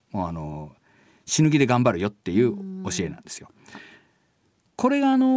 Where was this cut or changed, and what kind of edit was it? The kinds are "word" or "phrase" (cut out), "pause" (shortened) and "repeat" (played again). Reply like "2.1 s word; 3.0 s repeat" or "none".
none